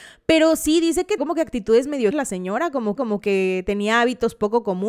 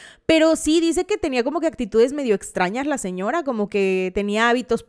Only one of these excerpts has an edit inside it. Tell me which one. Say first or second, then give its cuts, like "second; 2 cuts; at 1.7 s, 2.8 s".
first; 3 cuts; at 1.2 s, 2.1 s, 3.0 s